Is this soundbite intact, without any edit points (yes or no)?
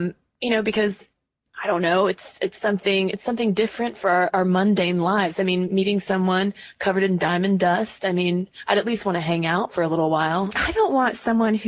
yes